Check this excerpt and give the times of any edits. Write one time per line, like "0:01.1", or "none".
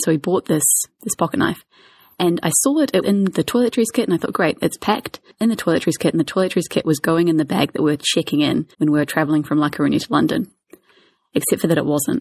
0:03.0
0:08.7